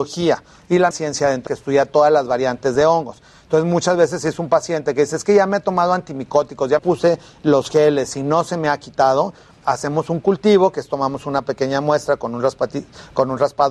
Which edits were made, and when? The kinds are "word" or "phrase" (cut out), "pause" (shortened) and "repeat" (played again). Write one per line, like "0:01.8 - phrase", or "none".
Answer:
0:00.9 - phrase
0:01.5 - phrase
0:06.8 - word
0:09.6 - word